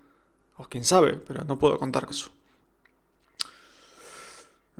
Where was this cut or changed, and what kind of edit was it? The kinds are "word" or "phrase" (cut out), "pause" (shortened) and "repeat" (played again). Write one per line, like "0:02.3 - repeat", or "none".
0:02.1 - word